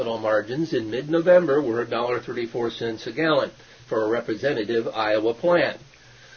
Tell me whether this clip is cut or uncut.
uncut